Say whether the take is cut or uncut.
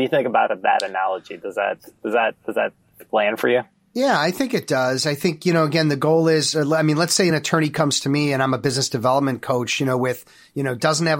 uncut